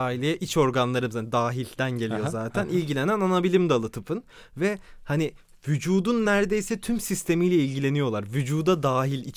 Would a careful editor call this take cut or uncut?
uncut